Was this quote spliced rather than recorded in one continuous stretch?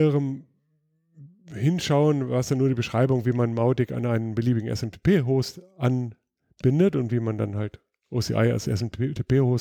no; 0 cuts

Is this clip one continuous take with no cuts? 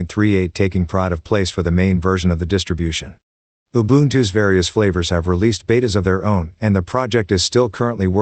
yes; 0 cuts

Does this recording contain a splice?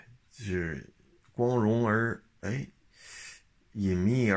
no; 0 cuts

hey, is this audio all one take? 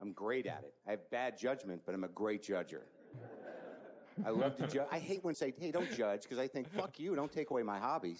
no; 1 cut; at 5.3 s

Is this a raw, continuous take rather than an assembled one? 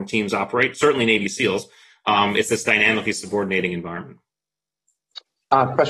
yes; 0 cuts

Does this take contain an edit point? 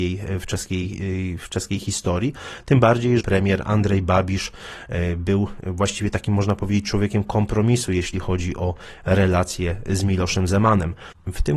yes; 1 cut; at 3.2 s

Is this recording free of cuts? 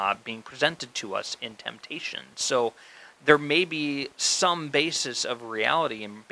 yes; 0 cuts

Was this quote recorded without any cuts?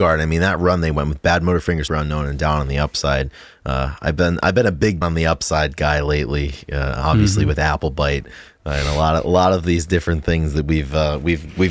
no; 2 cuts; at 1.9 s, 5.0 s

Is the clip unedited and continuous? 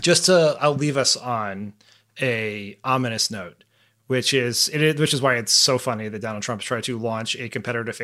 yes; 0 cuts

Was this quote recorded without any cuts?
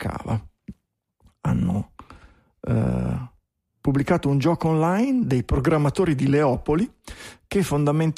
yes; 0 cuts

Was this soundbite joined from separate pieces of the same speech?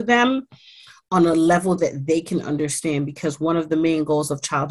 no; 0 cuts

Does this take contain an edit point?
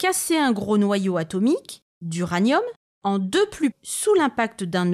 yes; 1 cut; at 3.7 s

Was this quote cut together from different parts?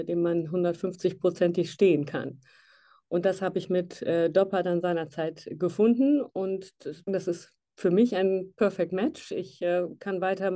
yes; 1 cut; at 7.1 s

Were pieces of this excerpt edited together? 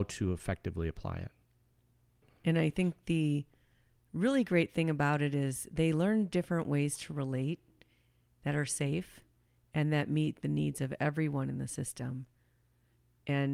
no; 0 cuts

